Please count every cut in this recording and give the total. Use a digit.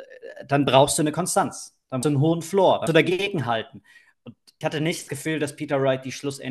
4